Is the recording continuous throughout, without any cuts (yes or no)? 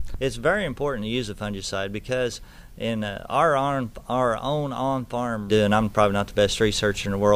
no